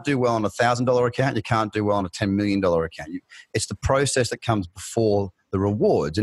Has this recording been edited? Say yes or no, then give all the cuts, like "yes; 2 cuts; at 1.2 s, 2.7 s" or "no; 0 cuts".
no; 0 cuts